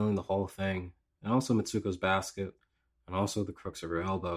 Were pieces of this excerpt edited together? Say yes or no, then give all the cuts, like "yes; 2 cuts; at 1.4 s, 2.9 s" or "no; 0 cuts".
no; 0 cuts